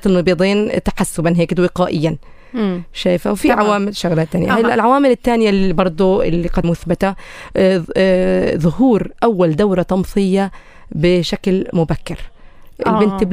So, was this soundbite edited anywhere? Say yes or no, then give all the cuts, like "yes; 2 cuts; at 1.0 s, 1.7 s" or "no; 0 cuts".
yes; 1 cut; at 6.6 s